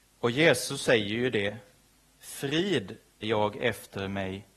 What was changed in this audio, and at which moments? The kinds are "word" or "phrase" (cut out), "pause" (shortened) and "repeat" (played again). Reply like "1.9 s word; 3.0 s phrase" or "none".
3.2 s word